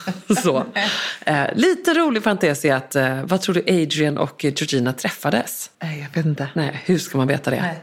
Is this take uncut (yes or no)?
no